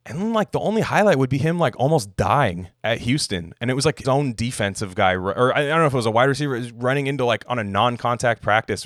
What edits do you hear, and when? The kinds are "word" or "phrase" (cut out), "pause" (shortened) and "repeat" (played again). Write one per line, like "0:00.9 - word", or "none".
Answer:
0:02.7 - pause
0:04.0 - word